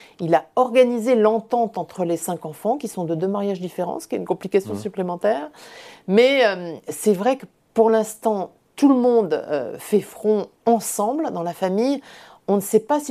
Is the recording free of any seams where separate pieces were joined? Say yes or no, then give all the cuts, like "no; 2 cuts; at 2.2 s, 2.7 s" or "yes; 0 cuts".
yes; 0 cuts